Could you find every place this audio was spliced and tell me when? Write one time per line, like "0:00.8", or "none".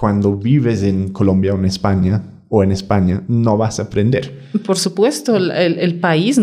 none